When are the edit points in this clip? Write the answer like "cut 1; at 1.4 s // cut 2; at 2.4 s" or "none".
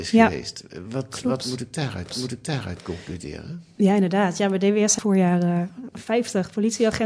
cut 1; at 2.1 s // cut 2; at 5.0 s // cut 3; at 5.9 s